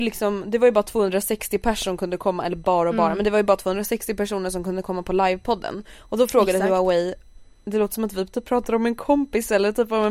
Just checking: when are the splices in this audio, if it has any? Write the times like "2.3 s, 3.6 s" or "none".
none